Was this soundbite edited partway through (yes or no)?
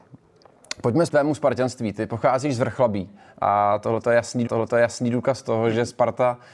yes